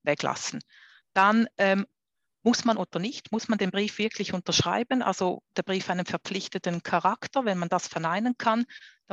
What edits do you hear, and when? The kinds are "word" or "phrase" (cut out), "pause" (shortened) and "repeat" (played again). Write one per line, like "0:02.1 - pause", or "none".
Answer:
0:02.8 - word
0:05.5 - word